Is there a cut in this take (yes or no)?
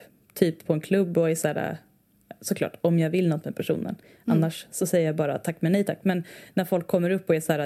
no